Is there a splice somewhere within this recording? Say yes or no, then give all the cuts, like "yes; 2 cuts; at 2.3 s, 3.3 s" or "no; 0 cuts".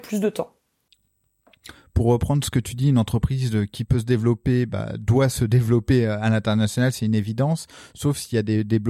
no; 0 cuts